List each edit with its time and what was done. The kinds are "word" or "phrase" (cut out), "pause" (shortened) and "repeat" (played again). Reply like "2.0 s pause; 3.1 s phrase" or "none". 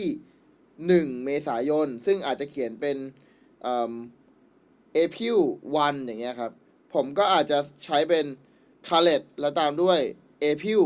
8.7 s pause